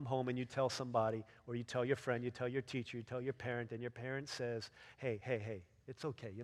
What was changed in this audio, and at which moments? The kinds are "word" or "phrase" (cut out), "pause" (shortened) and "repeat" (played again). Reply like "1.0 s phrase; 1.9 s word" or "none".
none